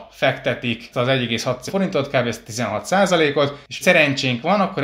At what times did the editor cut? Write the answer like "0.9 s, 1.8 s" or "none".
0.9 s, 1.7 s, 3.8 s